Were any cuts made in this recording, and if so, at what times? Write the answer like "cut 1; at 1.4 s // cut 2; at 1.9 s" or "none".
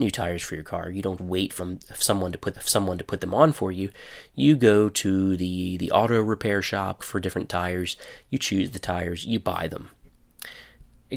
cut 1; at 1.2 s // cut 2; at 1.6 s // cut 3; at 2.5 s // cut 4; at 7.0 s